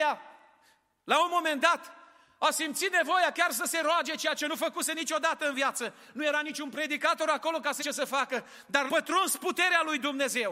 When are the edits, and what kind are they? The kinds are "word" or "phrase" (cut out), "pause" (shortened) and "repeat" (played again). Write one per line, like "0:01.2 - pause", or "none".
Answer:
0:07.8 - word
0:08.9 - word

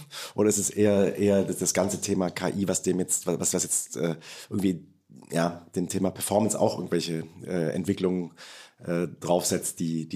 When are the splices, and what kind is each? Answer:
none

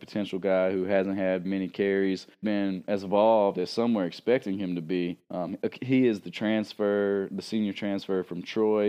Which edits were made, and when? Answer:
0:01.4 - word
0:02.4 - phrase
0:05.2 - pause

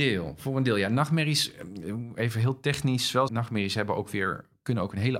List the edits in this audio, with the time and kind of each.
0:03.3 - phrase

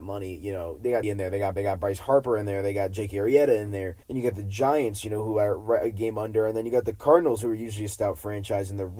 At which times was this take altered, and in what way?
0:01.0 - word
0:01.6 - repeat
0:04.0 - pause

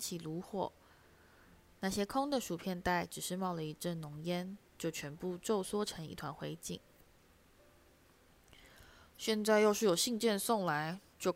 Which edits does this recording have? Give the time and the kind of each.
0:04.7 - pause

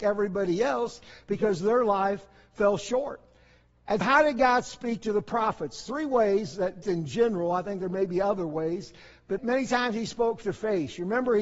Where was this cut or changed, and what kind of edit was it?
0:04.0 - word
0:06.8 - word
0:09.4 - word
0:10.4 - word

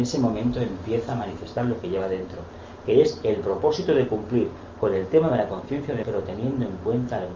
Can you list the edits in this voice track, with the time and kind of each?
0:06.0 - word

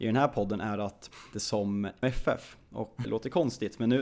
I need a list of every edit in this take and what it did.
0:01.3 - phrase
0:02.0 - phrase
0:03.0 - word

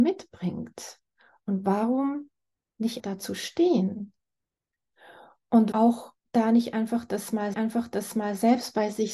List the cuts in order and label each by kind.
0:03.0 - word
0:05.7 - word
0:06.2 - pause
0:07.5 - repeat

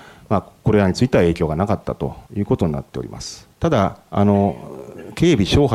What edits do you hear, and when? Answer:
0:02.3 - pause
0:03.5 - pause

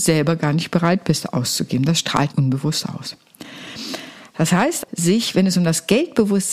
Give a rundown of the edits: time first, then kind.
0:02.3 - word
0:04.8 - word

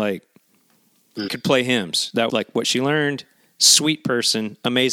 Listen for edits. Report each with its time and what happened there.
0:01.3 - word
0:02.3 - word

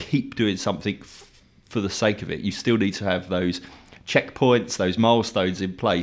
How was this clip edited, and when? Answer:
none

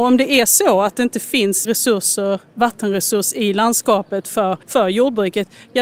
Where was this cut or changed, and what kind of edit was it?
0:01.6 - word
0:04.6 - pause

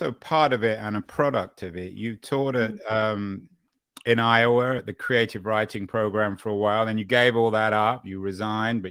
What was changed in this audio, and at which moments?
none

